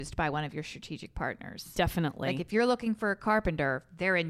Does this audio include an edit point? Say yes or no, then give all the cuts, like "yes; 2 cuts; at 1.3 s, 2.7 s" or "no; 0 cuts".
no; 0 cuts